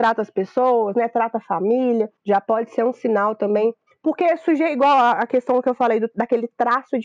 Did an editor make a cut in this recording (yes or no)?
no